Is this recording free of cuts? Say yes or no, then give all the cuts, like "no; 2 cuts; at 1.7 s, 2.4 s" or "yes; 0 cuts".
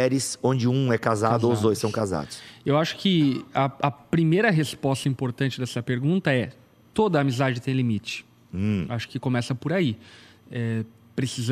yes; 0 cuts